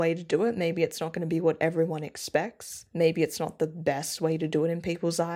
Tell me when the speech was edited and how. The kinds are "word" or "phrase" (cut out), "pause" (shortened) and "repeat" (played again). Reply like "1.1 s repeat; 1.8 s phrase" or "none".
none